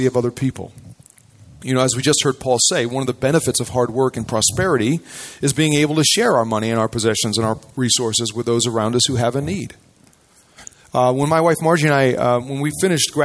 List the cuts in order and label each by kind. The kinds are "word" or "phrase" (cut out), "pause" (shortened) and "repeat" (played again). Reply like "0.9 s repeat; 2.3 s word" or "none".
none